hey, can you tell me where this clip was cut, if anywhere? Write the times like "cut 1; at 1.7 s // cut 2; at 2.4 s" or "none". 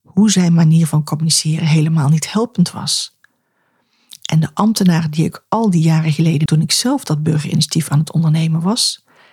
cut 1; at 6.5 s